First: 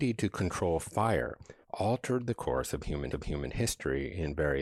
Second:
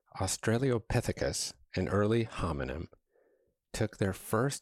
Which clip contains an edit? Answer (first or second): first